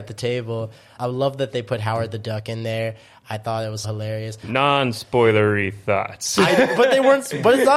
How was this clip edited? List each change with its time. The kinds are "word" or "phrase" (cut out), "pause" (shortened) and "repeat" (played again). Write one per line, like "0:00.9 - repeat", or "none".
0:01.0 - word
0:03.8 - word
0:06.8 - word